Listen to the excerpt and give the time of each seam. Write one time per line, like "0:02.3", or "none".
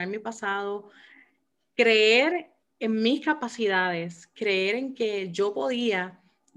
0:02.6